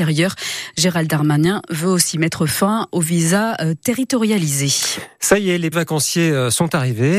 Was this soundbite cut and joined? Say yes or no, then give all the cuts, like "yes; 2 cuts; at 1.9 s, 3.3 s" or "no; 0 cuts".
yes; 1 cut; at 5.7 s